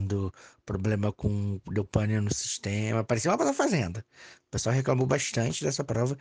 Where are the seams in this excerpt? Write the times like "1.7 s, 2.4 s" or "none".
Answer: 3.4 s